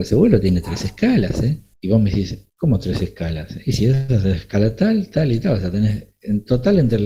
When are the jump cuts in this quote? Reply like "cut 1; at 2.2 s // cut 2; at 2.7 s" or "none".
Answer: cut 1; at 2.5 s